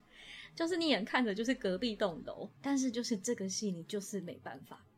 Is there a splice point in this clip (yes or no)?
yes